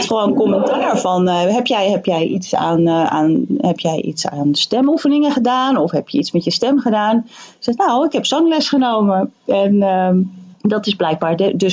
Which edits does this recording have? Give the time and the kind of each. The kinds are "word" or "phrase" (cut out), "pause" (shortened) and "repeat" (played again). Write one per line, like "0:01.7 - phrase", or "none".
0:10.5 - pause